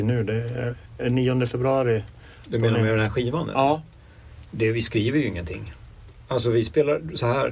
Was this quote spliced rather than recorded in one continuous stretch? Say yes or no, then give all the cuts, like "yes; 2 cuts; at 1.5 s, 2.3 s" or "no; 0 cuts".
no; 0 cuts